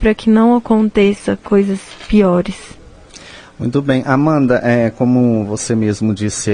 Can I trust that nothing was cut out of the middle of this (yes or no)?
yes